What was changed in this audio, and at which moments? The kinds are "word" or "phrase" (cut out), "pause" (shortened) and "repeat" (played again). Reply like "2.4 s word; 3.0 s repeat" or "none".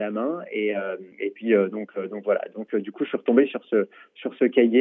1.1 s pause